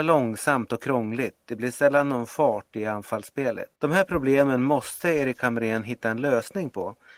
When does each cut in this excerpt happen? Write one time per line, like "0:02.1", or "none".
0:03.8